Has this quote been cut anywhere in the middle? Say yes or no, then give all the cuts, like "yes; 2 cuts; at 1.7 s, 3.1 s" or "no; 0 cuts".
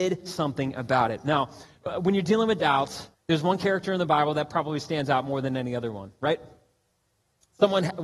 yes; 1 cut; at 3.1 s